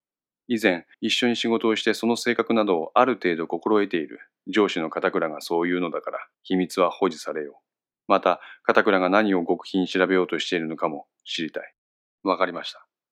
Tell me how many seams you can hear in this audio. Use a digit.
4